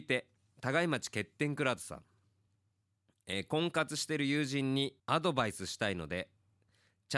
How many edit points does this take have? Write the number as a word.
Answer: one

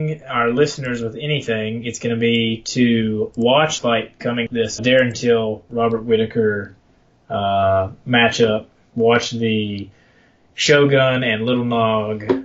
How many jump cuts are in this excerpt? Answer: three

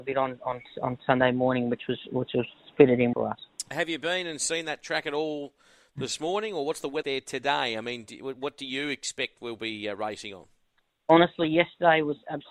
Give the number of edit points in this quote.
two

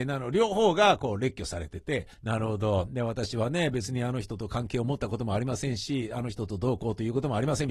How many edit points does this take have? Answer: one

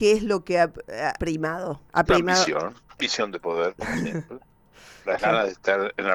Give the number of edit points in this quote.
three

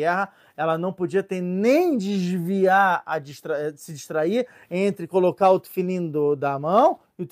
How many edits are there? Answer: zero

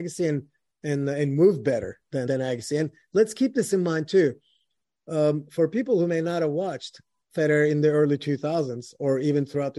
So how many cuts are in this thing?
one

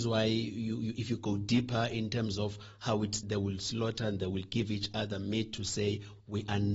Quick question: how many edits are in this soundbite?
one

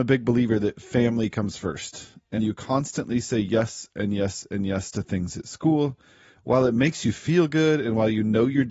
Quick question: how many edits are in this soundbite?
one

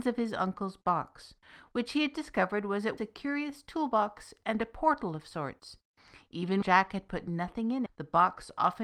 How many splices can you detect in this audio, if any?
three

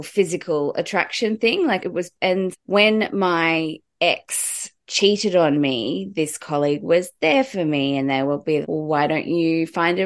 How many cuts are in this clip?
three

